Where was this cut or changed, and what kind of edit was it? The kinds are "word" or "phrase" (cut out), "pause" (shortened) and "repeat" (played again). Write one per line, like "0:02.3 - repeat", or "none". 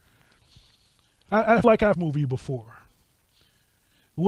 0:01.6 - word
0:01.9 - phrase